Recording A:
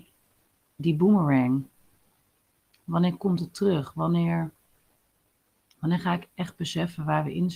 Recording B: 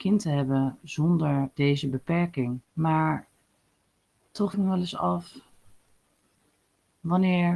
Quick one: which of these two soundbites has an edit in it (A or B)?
B